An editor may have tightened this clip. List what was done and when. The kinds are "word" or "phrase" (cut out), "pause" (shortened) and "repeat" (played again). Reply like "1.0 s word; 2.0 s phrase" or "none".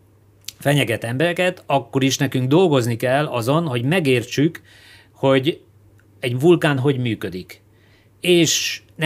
none